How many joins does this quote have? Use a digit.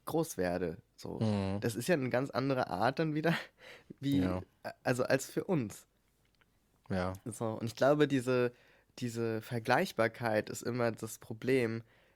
0